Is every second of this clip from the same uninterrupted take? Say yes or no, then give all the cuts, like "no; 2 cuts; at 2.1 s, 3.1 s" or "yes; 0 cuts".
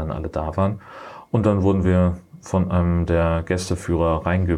yes; 0 cuts